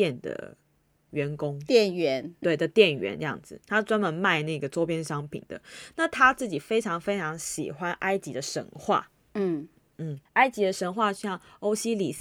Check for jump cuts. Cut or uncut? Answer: cut